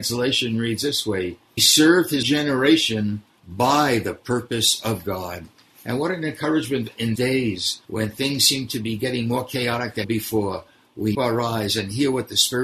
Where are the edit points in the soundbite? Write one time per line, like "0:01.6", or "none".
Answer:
0:01.6
0:02.2
0:07.2
0:07.8
0:10.0
0:11.1